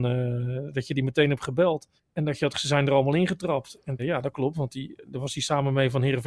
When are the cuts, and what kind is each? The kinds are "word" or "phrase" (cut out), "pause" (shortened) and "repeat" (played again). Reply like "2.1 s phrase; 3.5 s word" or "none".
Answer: 2.0 s pause; 2.5 s word; 4.0 s phrase